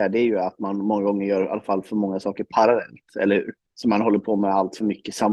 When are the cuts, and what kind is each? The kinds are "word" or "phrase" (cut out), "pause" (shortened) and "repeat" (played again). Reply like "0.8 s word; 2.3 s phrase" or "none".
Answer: 3.6 s pause